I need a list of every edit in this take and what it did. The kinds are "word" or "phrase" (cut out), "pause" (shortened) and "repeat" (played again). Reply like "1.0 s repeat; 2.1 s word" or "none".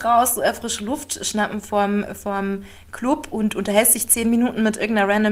none